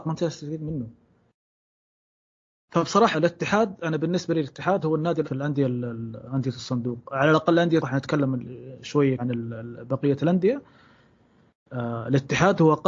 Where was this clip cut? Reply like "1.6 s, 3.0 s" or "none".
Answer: 3.1 s, 5.2 s, 7.8 s, 9.2 s